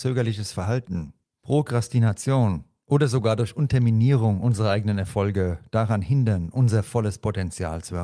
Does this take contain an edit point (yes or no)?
no